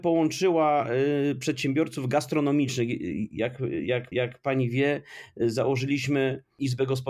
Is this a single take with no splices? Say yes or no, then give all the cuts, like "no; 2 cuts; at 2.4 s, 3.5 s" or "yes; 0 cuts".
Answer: no; 1 cut; at 4.1 s